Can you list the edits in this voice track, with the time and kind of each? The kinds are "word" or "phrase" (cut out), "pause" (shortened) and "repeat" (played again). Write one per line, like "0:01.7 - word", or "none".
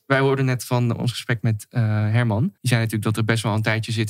0:02.6 - pause

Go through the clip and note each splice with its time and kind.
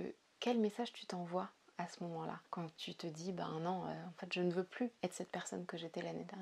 0:02.5 - pause

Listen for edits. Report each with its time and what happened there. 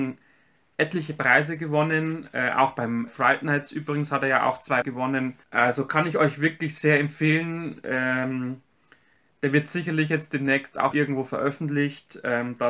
0:03.1 - word
0:04.8 - word
0:05.4 - pause
0:10.9 - word

